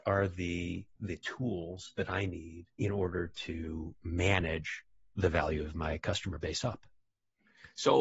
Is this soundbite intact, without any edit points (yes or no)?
no